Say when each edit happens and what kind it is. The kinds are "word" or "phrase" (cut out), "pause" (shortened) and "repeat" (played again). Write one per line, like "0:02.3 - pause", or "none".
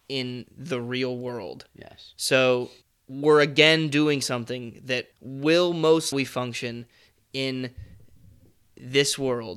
0:02.8 - pause
0:05.1 - pause
0:06.1 - phrase